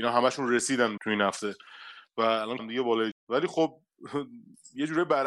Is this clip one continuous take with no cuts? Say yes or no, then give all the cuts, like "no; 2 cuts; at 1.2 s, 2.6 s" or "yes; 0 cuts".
no; 3 cuts; at 1.0 s, 2.6 s, 3.1 s